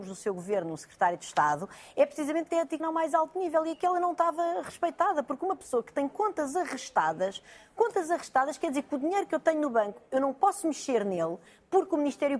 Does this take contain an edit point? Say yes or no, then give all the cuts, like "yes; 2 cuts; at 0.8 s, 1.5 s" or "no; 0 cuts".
yes; 2 cuts; at 2.5 s, 2.8 s